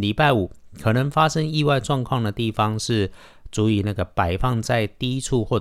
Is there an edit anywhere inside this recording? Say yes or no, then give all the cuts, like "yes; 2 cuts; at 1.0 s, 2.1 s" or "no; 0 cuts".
no; 0 cuts